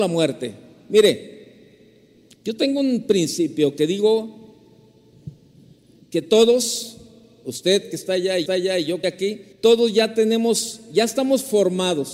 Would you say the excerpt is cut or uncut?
cut